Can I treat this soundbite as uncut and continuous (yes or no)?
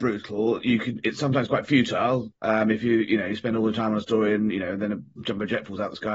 no